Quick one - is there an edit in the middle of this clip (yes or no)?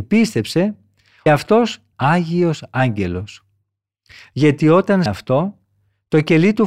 yes